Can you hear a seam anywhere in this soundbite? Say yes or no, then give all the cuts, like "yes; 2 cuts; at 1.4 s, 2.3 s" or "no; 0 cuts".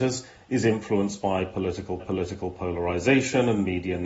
yes; 1 cut; at 2.0 s